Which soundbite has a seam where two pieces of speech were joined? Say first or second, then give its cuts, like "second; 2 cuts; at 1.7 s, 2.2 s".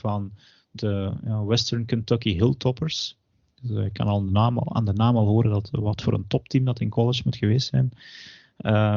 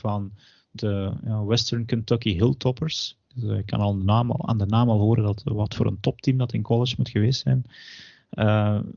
second; 1 cut; at 3.2 s